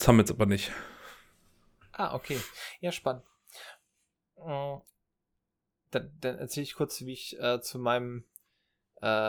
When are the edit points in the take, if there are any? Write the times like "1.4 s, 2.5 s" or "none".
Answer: none